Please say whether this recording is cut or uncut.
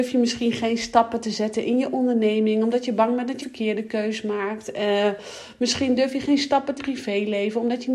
cut